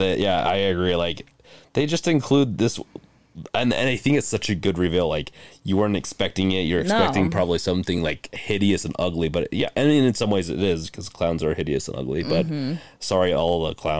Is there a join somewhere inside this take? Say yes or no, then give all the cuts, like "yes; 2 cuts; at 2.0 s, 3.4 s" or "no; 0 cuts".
no; 0 cuts